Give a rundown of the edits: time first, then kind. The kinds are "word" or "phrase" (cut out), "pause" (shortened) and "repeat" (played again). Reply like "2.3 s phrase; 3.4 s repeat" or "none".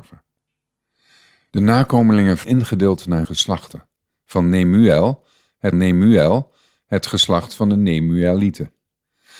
2.4 s word; 3.2 s word; 5.7 s repeat